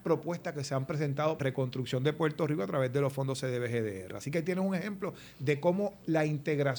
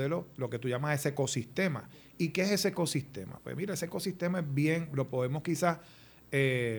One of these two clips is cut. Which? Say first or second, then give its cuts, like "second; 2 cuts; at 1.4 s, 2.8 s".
first; 1 cut; at 1.4 s